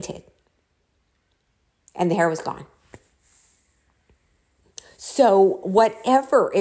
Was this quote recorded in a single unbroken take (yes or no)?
yes